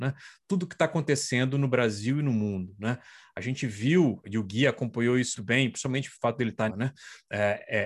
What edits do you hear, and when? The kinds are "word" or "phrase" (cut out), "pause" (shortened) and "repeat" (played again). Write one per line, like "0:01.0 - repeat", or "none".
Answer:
0:04.2 - word
0:05.3 - word
0:06.7 - phrase